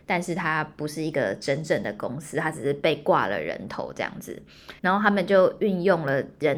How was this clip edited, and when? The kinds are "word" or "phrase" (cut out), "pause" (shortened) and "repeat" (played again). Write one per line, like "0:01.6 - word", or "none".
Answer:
0:04.8 - pause